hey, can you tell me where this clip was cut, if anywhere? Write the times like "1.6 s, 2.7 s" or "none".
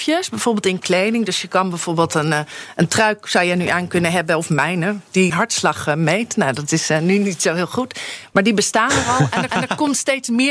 5.3 s, 9.5 s